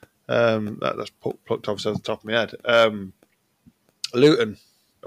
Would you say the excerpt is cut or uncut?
uncut